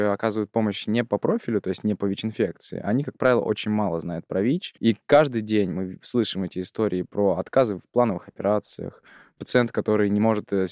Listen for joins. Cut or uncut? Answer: cut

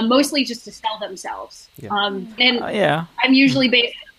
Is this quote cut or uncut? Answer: cut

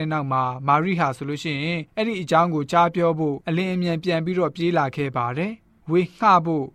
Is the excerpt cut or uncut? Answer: cut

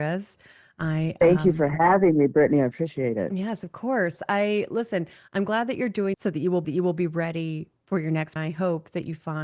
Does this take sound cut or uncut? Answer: cut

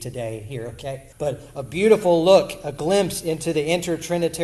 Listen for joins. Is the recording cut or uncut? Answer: cut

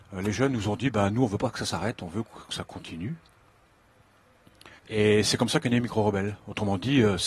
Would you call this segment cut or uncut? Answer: cut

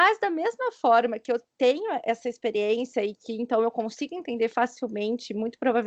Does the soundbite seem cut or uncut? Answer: uncut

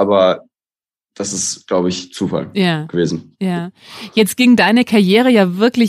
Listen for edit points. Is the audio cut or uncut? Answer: uncut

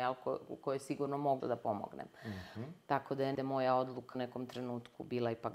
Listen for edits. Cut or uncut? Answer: cut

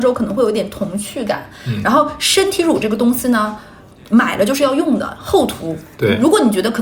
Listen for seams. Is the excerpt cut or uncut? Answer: uncut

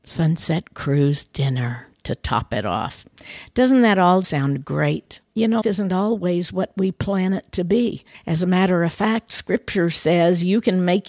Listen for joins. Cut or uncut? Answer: cut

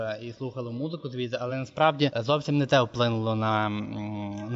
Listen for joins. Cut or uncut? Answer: uncut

